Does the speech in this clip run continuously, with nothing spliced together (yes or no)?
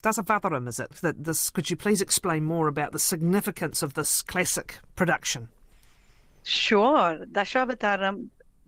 yes